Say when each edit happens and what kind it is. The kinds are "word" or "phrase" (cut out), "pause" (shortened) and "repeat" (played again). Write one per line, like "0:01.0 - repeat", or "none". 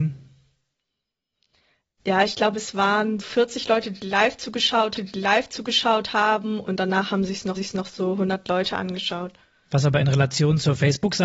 0:03.2 - word
0:05.0 - repeat
0:07.6 - repeat